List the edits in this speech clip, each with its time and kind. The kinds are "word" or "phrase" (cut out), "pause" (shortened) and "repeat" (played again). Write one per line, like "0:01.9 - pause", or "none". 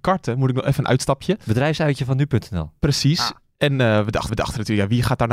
0:04.3 - repeat